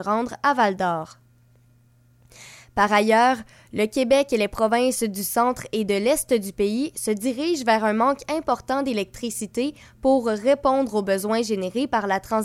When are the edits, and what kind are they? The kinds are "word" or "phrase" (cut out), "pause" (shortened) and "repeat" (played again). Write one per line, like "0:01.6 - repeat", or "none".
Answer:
none